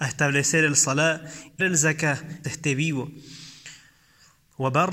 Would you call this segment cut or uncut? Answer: cut